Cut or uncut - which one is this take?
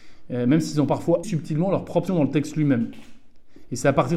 cut